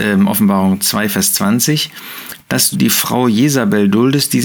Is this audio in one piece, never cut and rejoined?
no; 1 cut; at 2.7 s

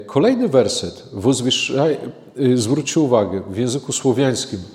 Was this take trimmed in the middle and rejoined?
no; 0 cuts

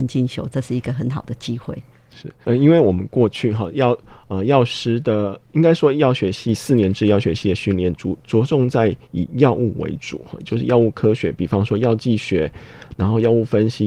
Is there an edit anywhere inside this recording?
yes; 1 cut; at 2.4 s

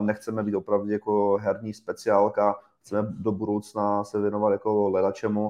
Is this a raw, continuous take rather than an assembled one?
yes; 0 cuts

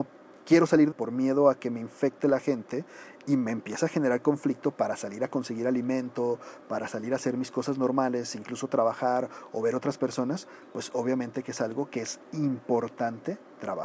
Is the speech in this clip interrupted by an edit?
yes; 1 cut; at 0.9 s

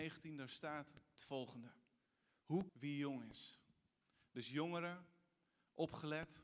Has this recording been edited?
yes; 2 cuts; at 1.2 s, 2.7 s

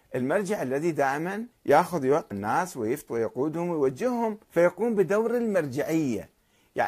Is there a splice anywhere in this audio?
yes; 4 cuts; at 1.5 s, 2.3 s, 3.1 s, 4.4 s

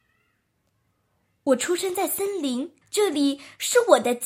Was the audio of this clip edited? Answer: yes; 1 cut; at 2.8 s

